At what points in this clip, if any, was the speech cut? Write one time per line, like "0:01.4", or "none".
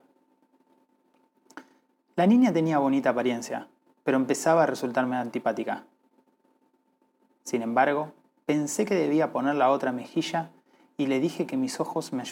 none